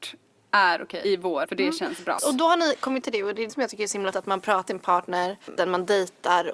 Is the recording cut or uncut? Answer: cut